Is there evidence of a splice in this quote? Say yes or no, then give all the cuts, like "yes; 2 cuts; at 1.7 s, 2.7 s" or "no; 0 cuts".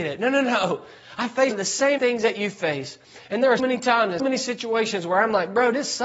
yes; 4 cuts; at 1.5 s, 2.0 s, 3.6 s, 4.2 s